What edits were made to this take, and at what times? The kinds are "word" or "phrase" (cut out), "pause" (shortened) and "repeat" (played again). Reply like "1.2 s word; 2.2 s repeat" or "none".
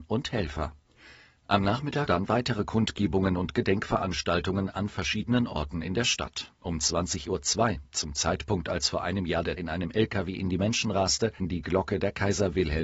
2.1 s word; 9.6 s word; 11.4 s word